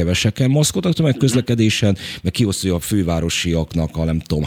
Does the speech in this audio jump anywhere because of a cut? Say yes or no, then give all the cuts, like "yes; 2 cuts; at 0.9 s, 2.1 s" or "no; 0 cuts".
no; 0 cuts